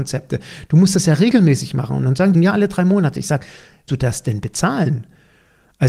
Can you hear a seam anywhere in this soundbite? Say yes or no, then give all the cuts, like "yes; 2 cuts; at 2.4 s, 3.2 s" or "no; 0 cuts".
yes; 2 cuts; at 2.3 s, 3.9 s